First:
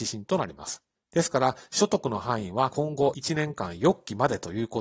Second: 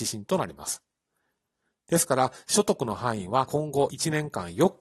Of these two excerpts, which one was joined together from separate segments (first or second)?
first